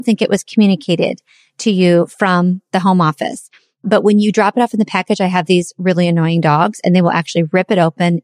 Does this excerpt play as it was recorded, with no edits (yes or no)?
yes